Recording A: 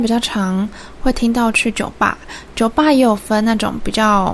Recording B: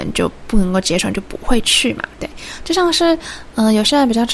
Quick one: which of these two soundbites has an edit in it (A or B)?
B